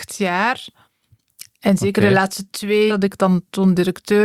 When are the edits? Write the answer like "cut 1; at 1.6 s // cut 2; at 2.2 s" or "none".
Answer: cut 1; at 2.9 s